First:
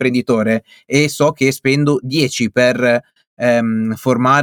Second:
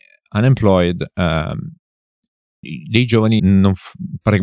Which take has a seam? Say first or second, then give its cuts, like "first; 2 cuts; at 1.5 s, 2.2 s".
second; 2 cuts; at 2.6 s, 3.4 s